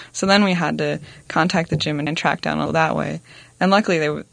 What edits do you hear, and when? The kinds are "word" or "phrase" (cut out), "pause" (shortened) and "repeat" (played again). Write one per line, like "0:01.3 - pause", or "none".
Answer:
0:02.1 - word
0:02.7 - word